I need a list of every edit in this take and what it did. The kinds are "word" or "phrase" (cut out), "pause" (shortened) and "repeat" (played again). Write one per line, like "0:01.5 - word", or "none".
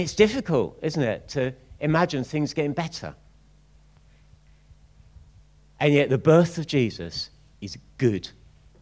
none